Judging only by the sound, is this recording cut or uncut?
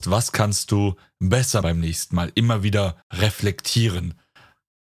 cut